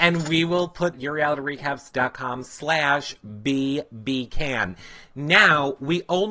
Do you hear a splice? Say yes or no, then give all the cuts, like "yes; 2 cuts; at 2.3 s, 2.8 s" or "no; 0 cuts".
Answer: yes; 1 cut; at 0.9 s